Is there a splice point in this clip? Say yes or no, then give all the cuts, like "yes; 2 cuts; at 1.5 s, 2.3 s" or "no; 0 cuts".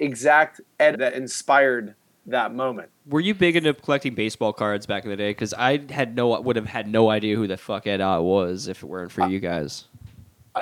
yes; 2 cuts; at 0.9 s, 3.0 s